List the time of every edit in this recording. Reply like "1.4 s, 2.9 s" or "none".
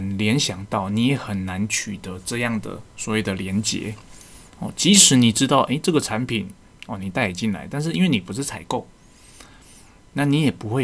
none

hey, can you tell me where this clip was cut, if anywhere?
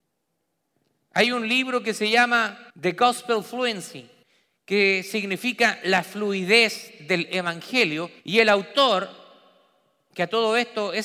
2.7 s, 4.2 s, 8.2 s

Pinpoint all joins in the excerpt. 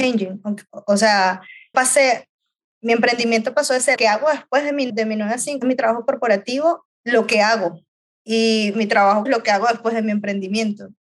1.7 s, 4.0 s, 4.9 s, 5.6 s, 6.8 s, 9.3 s

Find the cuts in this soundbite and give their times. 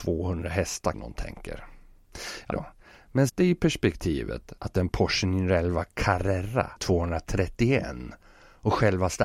0.9 s, 2.5 s, 3.3 s, 4.6 s, 6.8 s

